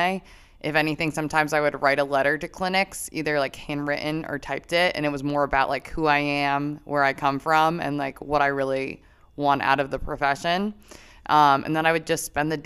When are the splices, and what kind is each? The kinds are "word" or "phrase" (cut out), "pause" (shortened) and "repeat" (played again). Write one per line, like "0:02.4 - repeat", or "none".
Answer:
none